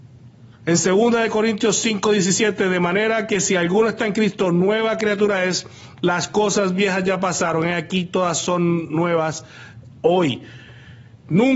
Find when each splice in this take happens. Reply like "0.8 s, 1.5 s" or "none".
none